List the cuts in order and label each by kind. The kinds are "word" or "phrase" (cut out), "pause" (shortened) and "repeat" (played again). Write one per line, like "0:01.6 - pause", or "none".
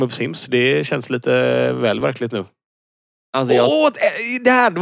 none